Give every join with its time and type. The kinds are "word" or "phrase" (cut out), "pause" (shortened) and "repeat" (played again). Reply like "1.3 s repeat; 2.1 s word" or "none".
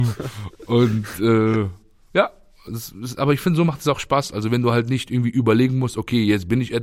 none